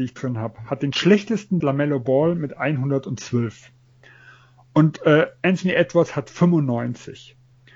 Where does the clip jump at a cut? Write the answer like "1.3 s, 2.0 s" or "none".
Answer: 1.6 s

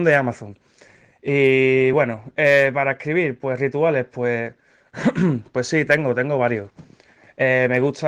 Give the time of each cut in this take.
none

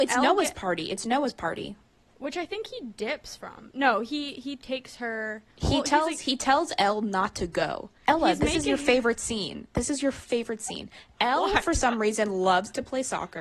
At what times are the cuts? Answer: 1.9 s, 5.5 s, 8.0 s

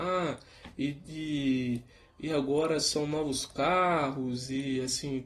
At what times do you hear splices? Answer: none

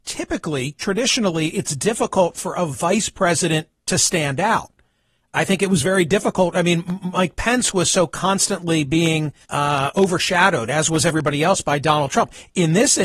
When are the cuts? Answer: 9.4 s

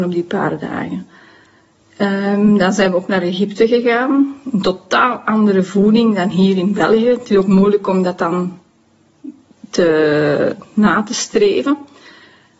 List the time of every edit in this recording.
none

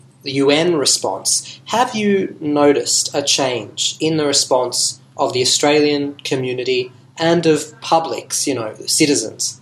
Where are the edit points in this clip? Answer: none

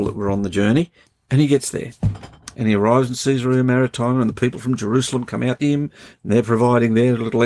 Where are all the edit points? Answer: 1.0 s, 5.6 s

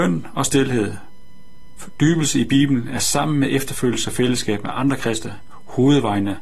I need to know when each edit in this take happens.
none

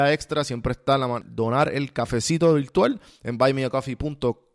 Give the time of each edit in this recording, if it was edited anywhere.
none

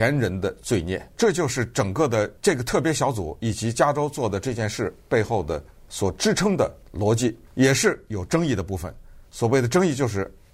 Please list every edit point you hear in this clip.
1.1 s, 2.4 s, 5.7 s, 6.8 s, 7.5 s

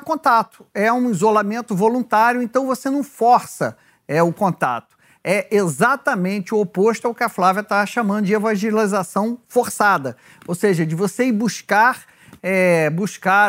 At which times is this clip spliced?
none

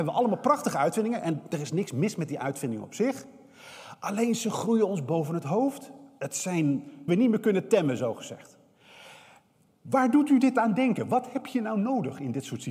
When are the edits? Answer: 7.1 s

